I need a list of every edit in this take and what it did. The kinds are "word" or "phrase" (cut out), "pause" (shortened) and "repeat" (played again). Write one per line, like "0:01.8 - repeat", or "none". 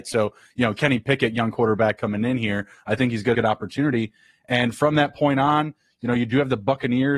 0:03.3 - phrase

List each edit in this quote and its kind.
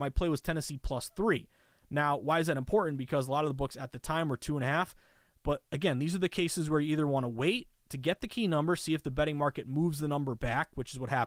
none

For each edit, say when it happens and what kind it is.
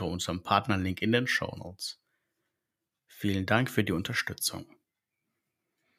none

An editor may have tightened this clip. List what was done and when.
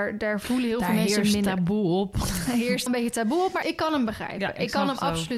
0:02.9 - word
0:03.6 - word

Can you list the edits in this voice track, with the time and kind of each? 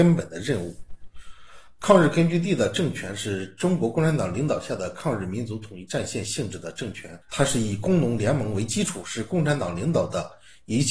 0:07.2 - pause

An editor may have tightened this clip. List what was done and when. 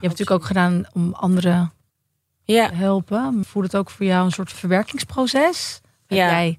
0:03.4 - word
0:04.5 - word

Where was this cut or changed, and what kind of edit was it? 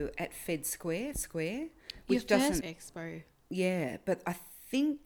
0:01.1 - word
0:02.6 - phrase

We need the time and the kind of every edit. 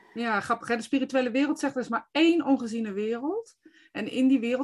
none

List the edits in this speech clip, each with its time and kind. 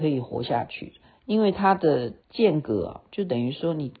0:01.0 - pause
0:02.2 - pause

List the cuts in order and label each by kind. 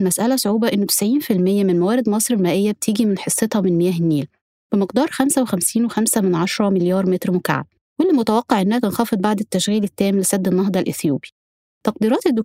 none

